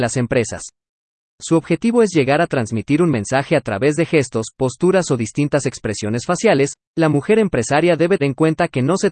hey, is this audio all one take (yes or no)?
no